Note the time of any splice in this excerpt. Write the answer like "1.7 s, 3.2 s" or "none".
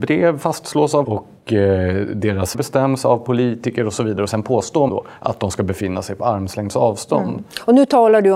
1.0 s, 2.5 s, 4.9 s